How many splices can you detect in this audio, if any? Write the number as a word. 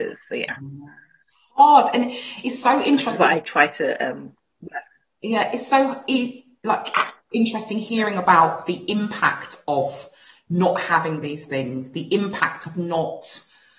zero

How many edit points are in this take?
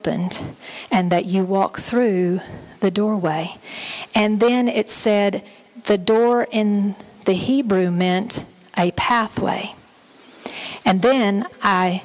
zero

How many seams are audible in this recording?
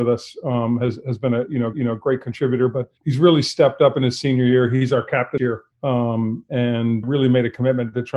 five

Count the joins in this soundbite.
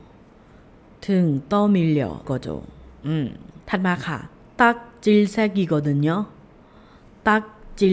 two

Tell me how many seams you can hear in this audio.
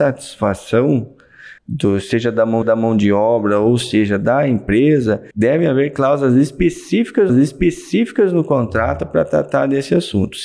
four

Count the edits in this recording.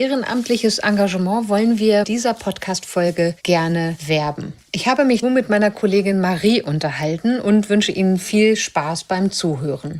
two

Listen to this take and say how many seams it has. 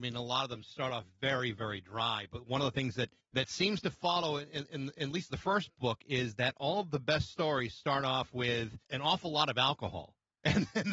two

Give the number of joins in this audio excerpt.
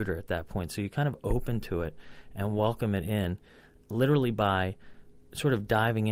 zero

